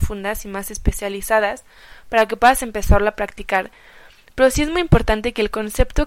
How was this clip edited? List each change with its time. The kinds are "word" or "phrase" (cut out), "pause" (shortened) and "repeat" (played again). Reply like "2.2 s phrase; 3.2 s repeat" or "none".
none